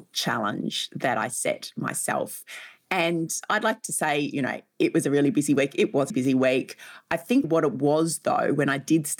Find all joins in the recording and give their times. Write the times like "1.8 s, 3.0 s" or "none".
6.1 s, 7.4 s